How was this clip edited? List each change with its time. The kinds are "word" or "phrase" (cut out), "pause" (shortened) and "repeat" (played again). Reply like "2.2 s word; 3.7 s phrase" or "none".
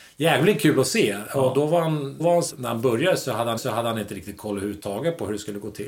2.2 s word; 2.5 s word; 3.6 s repeat